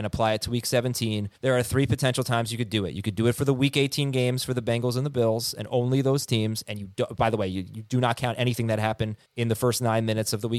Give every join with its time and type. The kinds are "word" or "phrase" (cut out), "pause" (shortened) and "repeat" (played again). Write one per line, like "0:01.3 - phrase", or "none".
0:01.4 - pause
0:09.3 - pause

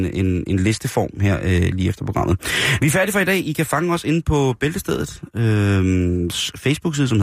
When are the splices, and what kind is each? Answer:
none

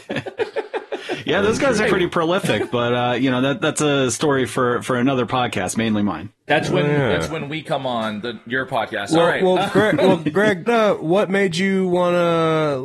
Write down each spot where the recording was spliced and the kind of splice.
0:01.8 - word
0:10.7 - word

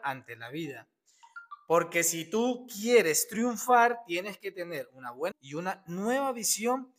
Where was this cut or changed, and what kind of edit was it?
0:05.3 - word

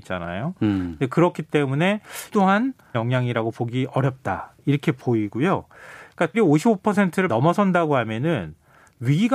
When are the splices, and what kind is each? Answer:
0:02.3 - word
0:02.9 - word
0:06.3 - word
0:07.3 - word

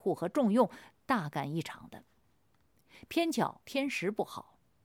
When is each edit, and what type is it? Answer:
0:03.6 - pause

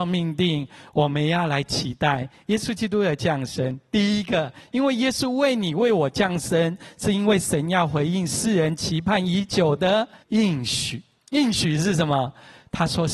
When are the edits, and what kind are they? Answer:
0:10.2 - pause

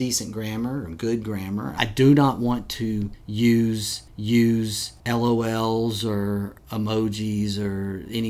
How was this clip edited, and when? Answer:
0:04.1 - repeat

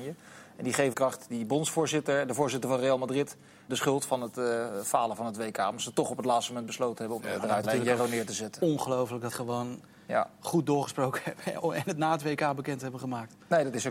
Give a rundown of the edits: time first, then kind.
0:00.9 - phrase
0:03.7 - word
0:07.2 - phrase
0:07.6 - word
0:09.3 - phrase

